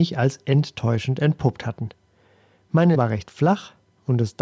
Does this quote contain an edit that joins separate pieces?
yes; 1 cut; at 2.9 s

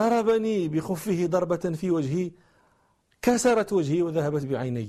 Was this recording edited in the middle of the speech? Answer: no; 0 cuts

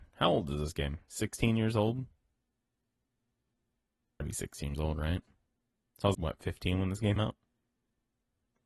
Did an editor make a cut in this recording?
yes; 4 cuts; at 4.2 s, 4.7 s, 6.1 s, 7.2 s

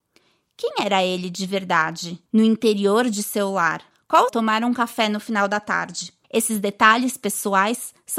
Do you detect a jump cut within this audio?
yes; 4 cuts; at 2.3 s, 3.9 s, 4.3 s, 6.2 s

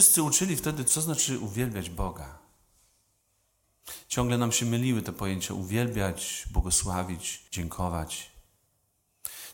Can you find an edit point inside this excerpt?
yes; 1 cut; at 7.5 s

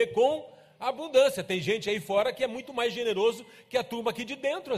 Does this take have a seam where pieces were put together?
no; 0 cuts

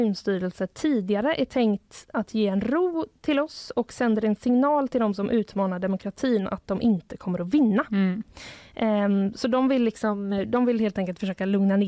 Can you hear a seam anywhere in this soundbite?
no; 0 cuts

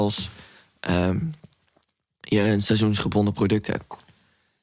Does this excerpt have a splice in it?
no; 0 cuts

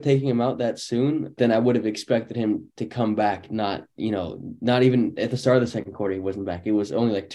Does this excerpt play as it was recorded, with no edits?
no; 1 cut; at 1.4 s

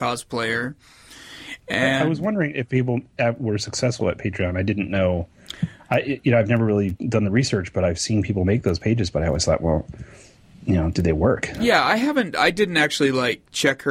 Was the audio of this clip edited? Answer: no; 0 cuts

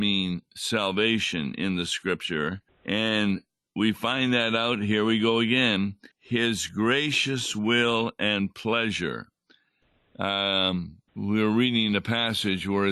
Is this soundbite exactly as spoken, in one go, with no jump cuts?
no; 3 cuts; at 2.7 s, 6.1 s, 11.1 s

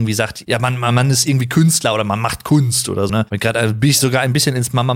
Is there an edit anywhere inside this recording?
yes; 1 cut; at 3.1 s

